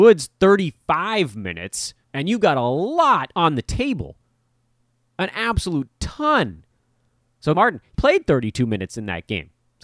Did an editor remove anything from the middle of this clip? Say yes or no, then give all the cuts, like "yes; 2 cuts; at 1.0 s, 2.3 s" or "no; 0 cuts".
yes; 3 cuts; at 2.0 s, 7.5 s, 7.9 s